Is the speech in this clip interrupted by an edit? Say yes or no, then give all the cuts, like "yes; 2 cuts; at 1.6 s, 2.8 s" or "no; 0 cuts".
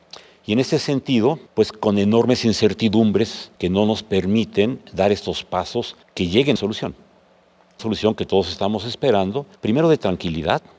yes; 6 cuts; at 1.5 s, 3.6 s, 6.0 s, 6.6 s, 7.8 s, 9.6 s